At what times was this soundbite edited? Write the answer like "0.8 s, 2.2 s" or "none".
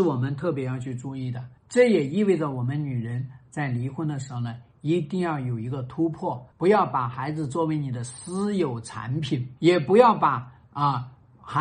1.6 s, 6.5 s, 9.6 s